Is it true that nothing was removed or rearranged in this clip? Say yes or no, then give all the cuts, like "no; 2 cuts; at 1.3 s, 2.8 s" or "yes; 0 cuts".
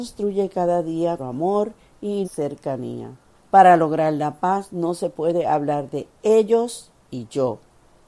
no; 3 cuts; at 1.2 s, 2.2 s, 3.3 s